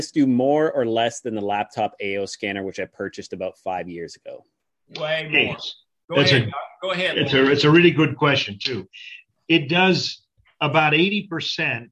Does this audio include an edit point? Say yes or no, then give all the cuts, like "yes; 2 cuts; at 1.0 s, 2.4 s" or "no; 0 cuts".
no; 0 cuts